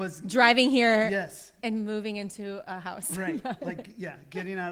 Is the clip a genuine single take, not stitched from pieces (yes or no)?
yes